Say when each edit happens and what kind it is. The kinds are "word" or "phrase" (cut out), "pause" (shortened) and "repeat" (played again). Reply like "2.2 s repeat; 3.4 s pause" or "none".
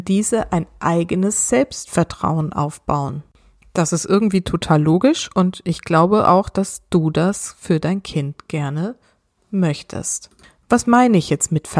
none